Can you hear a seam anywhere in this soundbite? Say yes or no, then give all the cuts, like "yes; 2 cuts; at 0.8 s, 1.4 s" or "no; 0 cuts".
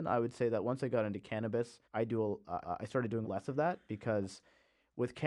yes; 3 cuts; at 1.8 s, 2.6 s, 3.2 s